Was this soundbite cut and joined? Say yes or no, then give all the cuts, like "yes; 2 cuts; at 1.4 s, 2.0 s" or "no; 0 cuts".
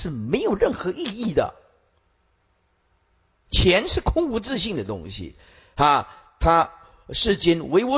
no; 0 cuts